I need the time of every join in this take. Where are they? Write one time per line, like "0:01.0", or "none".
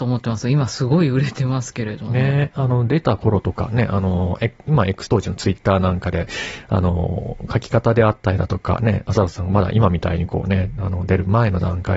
0:05.0